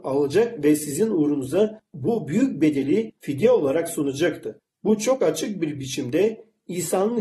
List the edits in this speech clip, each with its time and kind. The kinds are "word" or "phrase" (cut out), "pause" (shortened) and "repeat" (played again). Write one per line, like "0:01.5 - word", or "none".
none